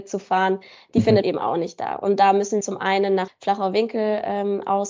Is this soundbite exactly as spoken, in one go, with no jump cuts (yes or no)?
no